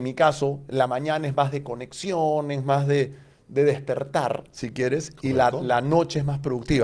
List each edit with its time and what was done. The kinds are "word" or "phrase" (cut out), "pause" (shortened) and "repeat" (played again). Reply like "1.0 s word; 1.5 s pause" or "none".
none